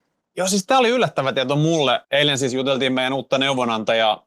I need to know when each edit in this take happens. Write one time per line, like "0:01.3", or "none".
0:02.0

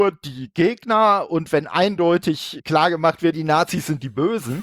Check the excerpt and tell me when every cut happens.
0:02.6
0:03.3

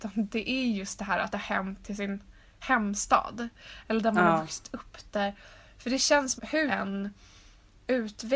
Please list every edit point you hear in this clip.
0:01.3
0:06.4
0:06.7

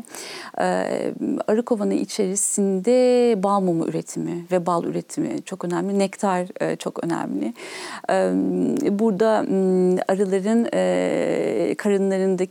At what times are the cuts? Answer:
none

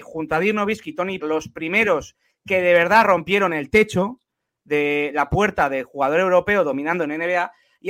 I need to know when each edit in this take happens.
0:01.2

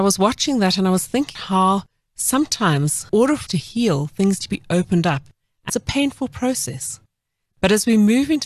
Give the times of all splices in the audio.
0:01.4
0:03.1
0:03.5
0:04.4
0:05.7

